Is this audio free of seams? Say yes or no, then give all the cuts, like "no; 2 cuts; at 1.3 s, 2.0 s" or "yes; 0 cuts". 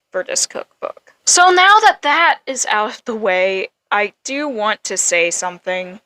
no; 1 cut; at 1.2 s